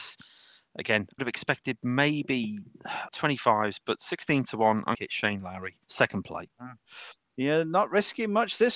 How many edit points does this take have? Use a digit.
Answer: 4